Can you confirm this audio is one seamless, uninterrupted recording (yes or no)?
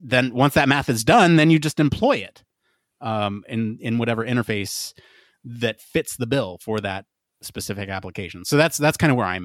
yes